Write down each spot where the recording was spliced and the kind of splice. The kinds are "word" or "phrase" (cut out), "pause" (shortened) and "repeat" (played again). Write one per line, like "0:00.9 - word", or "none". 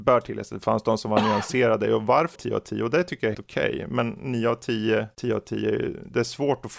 0:02.4 - phrase
0:03.3 - word